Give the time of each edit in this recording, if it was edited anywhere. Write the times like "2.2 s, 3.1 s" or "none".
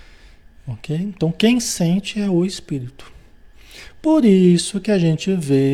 none